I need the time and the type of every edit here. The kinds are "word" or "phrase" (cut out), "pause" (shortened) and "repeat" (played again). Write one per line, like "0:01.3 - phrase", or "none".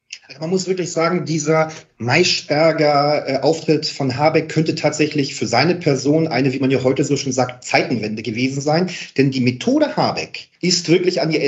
0:10.5 - pause